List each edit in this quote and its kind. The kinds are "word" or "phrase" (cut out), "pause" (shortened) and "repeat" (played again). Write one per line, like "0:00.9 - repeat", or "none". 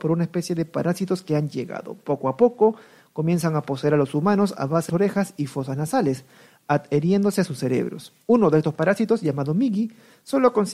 0:04.9 - phrase
0:08.2 - pause